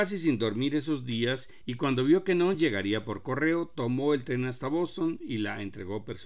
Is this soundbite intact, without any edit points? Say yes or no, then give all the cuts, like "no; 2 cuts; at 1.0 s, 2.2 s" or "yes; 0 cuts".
yes; 0 cuts